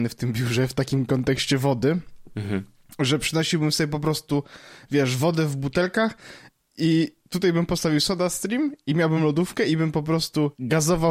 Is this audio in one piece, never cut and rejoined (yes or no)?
yes